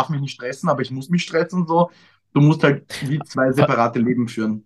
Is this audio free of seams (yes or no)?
yes